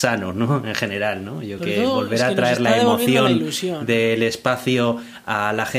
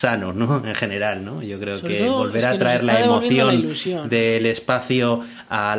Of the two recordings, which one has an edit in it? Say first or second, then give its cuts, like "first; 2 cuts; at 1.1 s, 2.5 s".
first; 1 cut; at 1.6 s